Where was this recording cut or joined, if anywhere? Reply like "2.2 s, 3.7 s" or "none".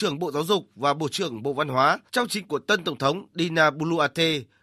2.1 s, 2.5 s